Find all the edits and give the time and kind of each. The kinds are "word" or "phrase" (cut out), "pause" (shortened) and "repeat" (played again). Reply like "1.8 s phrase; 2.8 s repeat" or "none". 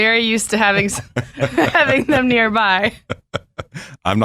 none